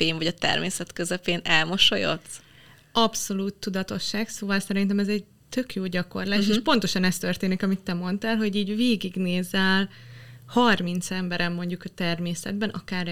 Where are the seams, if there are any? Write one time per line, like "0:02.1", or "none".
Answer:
none